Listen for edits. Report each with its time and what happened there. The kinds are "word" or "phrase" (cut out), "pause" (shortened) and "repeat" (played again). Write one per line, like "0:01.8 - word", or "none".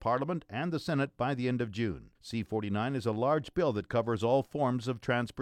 0:02.2 - pause